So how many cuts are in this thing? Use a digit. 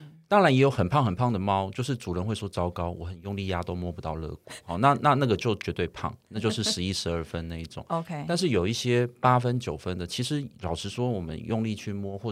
0